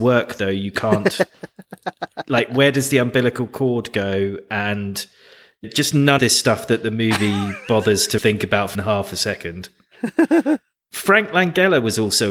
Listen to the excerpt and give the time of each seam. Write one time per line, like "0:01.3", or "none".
0:05.6
0:06.2
0:08.2
0:08.7